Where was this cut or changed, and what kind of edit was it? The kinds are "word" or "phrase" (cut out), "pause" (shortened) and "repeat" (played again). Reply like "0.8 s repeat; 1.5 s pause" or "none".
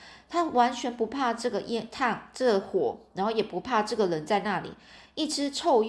none

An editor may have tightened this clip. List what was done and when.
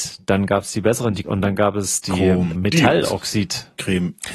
1.2 s word; 2.6 s word

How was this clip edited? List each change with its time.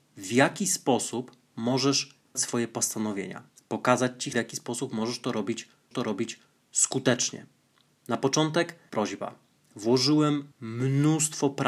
2.3 s word; 3.5 s pause; 4.3 s word; 5.9 s repeat; 8.9 s word; 10.5 s pause

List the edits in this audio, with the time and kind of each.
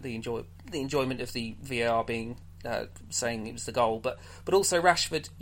none

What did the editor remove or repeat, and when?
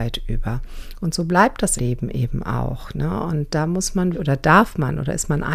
1.8 s word; 4.1 s word

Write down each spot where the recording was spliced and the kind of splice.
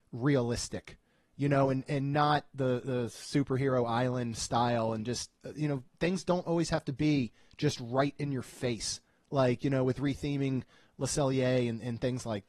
none

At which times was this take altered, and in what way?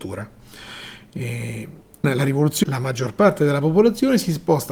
2.0 s word; 2.6 s word

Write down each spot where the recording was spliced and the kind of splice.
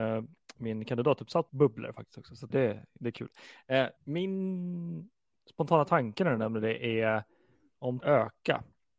1.5 s word; 2.5 s word; 4.0 s pause; 8.0 s phrase

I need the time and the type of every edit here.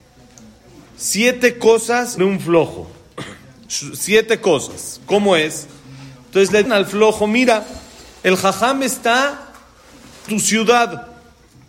2.2 s word; 6.7 s word; 10.3 s word

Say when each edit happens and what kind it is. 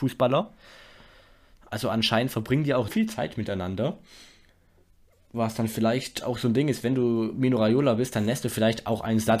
2.9 s word

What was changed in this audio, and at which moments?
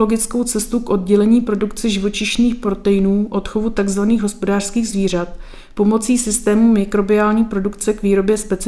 none

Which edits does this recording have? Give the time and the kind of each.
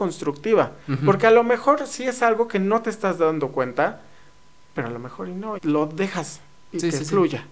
5.6 s word

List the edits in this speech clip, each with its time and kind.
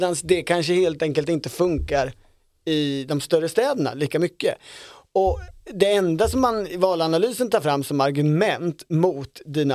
none

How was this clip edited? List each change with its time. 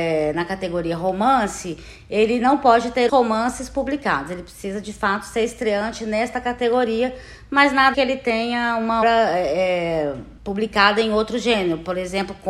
3.1 s word; 7.9 s word; 9.0 s word; 10.4 s pause

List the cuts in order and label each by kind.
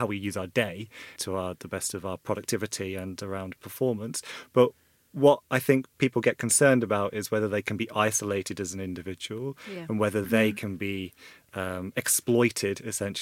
none

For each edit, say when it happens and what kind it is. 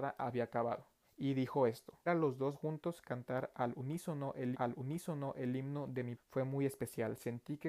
1.0 s pause; 2.1 s word; 2.5 s word; 4.5 s repeat; 6.2 s word

